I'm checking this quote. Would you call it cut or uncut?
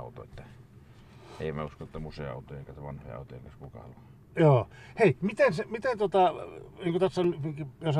uncut